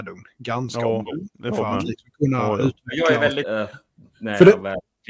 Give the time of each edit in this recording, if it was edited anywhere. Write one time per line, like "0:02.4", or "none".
0:01.3
0:03.4

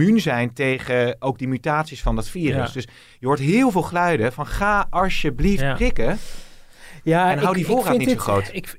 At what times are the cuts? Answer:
none

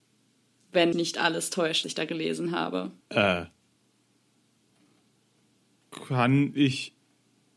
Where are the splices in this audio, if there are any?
0:00.9
0:01.8
0:03.0

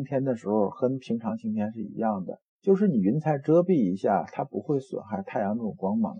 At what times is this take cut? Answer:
0:02.5

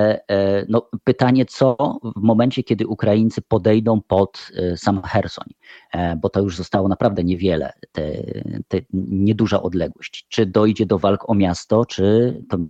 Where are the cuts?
none

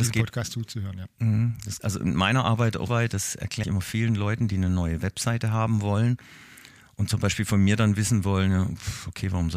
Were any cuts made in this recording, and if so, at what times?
0:01.8
0:02.9
0:03.6

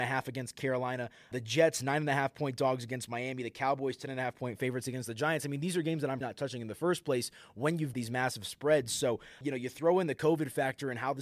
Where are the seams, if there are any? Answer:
0:01.3
0:06.2
0:07.9
0:09.4

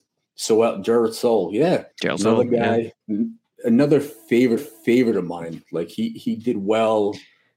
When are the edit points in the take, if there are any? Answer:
0:01.9
0:03.0
0:04.6

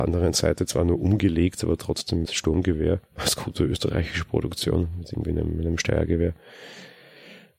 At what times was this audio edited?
0:02.2
0:03.1

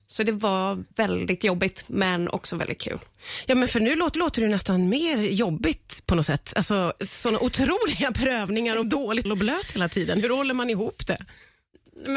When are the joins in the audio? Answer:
0:00.9
0:04.1
0:08.8
0:09.2

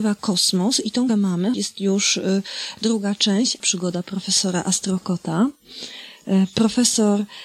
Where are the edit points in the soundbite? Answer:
0:01.1
0:01.5
0:03.6

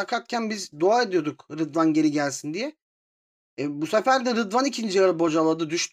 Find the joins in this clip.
none

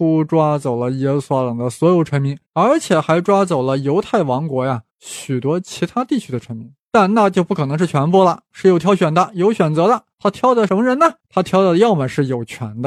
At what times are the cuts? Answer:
0:02.4
0:04.9
0:06.8
0:10.1

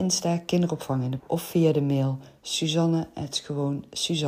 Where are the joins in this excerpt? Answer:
0:01.2

